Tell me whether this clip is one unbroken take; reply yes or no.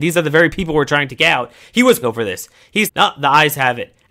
no